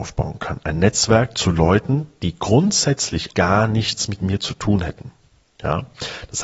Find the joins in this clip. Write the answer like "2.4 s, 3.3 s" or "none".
3.3 s